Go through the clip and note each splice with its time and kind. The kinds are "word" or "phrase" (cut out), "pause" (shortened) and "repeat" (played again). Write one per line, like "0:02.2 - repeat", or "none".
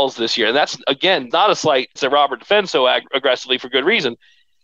0:01.3 - word
0:02.0 - phrase